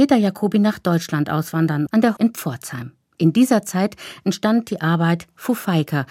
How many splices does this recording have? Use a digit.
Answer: 2